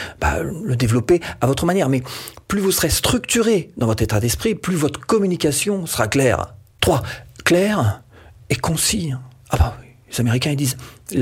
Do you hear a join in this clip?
no; 0 cuts

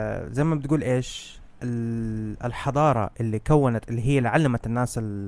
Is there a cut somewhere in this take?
no; 0 cuts

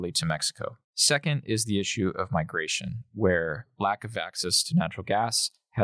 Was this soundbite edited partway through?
no; 0 cuts

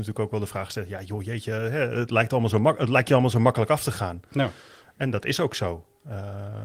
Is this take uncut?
yes; 0 cuts

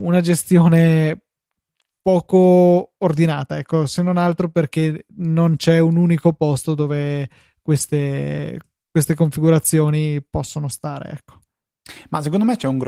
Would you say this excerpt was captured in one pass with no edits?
yes; 0 cuts

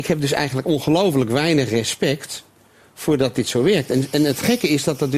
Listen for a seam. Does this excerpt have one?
no; 0 cuts

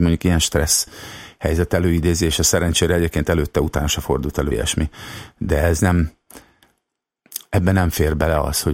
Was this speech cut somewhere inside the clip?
yes; 1 cut; at 4.5 s

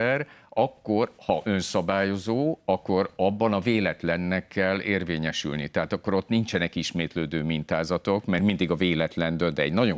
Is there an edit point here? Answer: no; 0 cuts

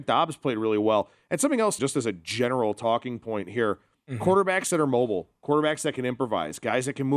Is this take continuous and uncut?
no; 1 cut; at 1.8 s

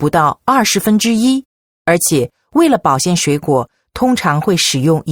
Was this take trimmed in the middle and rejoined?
no; 0 cuts

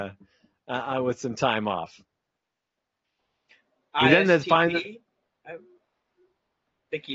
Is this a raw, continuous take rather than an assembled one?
yes; 0 cuts

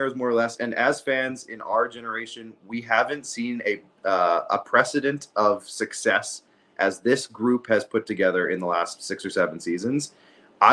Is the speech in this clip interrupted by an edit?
no; 0 cuts

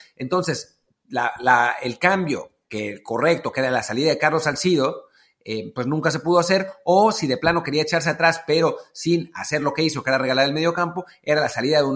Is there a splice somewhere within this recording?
no; 0 cuts

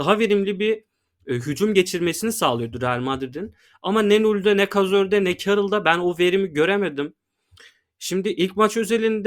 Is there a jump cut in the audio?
no; 0 cuts

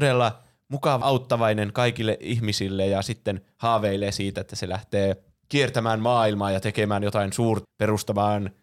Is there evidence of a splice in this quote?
yes; 3 cuts; at 1.0 s, 5.3 s, 7.6 s

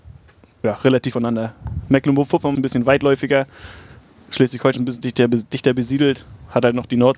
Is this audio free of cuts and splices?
no; 3 cuts; at 1.1 s, 2.6 s, 4.8 s

